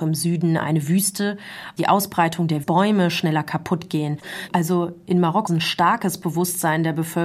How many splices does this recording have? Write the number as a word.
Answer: two